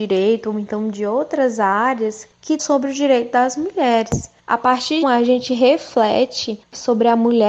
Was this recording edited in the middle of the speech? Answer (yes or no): yes